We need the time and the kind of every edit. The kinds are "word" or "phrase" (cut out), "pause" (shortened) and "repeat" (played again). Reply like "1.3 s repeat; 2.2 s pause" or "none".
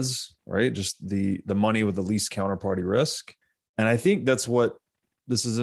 3.4 s pause